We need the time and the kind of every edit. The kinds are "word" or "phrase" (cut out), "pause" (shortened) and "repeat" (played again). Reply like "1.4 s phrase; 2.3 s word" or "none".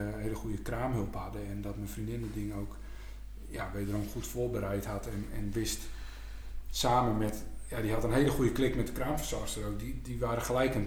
none